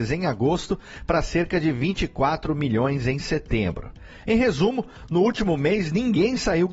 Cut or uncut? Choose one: uncut